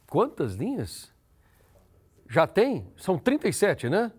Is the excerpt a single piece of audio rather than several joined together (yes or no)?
yes